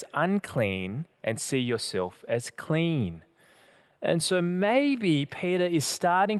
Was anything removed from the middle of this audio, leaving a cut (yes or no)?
no